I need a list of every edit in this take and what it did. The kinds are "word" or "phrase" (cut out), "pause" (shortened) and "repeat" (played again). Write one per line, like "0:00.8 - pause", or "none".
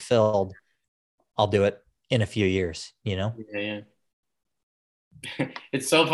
none